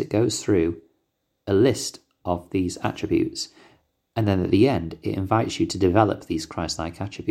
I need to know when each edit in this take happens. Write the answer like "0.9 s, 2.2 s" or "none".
none